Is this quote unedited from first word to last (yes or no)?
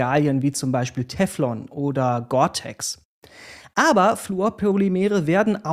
yes